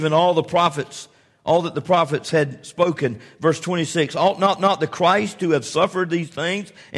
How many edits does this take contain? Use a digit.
1